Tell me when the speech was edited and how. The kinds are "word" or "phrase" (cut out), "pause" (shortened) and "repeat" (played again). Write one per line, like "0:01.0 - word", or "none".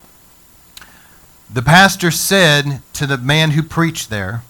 0:02.8 - pause